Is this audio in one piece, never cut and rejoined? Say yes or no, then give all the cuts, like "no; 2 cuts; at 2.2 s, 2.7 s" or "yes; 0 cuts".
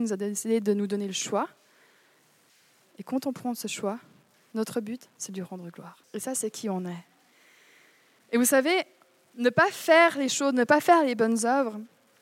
no; 1 cut; at 6.0 s